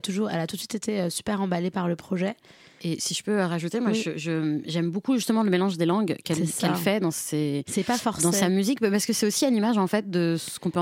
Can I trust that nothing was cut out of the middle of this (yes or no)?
yes